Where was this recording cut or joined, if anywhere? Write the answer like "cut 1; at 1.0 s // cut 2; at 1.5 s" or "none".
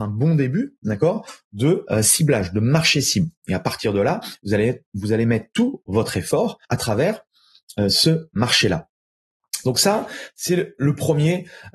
cut 1; at 6.6 s